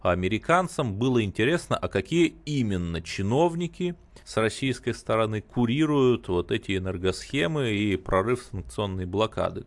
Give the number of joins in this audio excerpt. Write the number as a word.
one